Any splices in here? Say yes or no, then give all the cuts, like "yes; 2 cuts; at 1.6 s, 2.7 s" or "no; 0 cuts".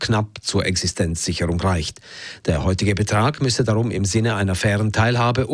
no; 0 cuts